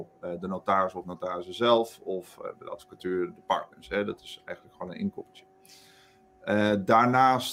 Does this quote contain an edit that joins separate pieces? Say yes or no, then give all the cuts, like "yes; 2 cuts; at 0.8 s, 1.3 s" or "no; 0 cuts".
no; 0 cuts